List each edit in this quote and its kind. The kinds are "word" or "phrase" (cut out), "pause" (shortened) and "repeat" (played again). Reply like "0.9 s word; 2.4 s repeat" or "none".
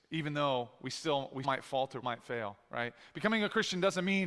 1.4 s word; 2.0 s word

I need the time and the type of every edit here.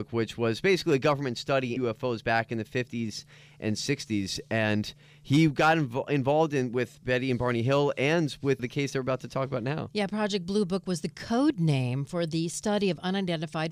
1.8 s word; 8.6 s word

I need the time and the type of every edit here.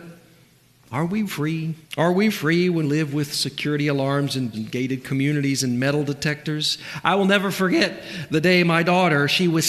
1.2 s word; 1.8 s pause; 2.3 s word; 2.8 s word; 4.5 s word

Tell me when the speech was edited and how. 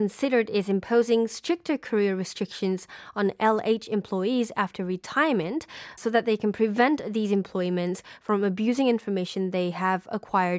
6.0 s word

